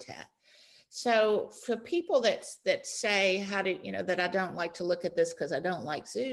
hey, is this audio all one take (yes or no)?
yes